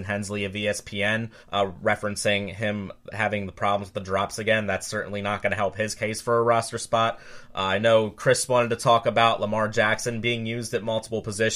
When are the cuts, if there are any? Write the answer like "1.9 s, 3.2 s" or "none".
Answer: 1.4 s